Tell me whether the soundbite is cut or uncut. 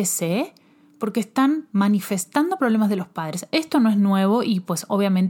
cut